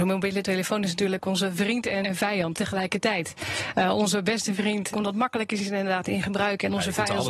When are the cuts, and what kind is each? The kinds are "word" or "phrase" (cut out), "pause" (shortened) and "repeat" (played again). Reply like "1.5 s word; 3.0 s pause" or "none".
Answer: 2.0 s word; 2.5 s word; 4.9 s word